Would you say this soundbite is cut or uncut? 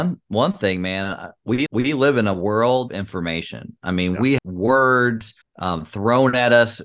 cut